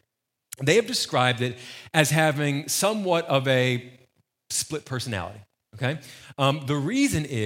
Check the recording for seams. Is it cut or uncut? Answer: uncut